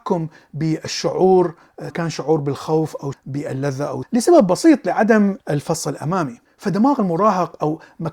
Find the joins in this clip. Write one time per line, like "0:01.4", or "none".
0:01.9
0:03.1
0:04.0
0:05.4